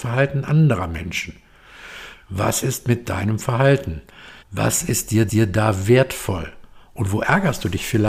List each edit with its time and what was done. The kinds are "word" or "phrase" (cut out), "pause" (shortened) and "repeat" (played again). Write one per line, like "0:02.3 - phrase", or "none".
0:04.4 - pause
0:05.3 - repeat